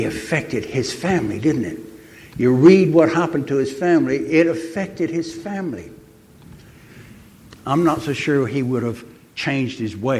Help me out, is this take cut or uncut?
uncut